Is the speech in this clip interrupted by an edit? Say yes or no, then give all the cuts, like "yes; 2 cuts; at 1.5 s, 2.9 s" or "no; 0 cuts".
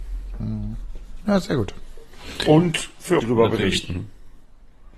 yes; 1 cut; at 3.2 s